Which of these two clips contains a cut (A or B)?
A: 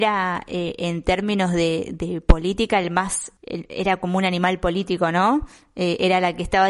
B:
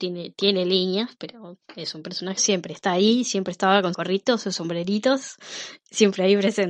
B